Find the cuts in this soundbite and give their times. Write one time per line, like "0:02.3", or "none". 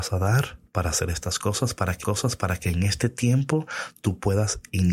0:02.0